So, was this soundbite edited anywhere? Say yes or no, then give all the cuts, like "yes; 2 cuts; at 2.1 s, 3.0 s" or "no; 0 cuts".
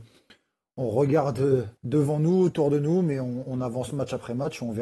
yes; 1 cut; at 1.8 s